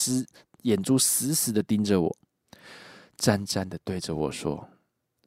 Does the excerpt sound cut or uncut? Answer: uncut